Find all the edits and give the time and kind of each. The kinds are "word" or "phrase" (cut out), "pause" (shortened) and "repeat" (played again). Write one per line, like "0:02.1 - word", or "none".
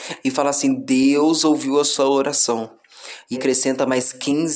0:03.3 - word